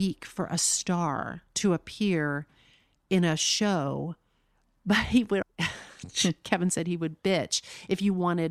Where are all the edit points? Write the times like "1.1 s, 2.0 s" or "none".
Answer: 5.4 s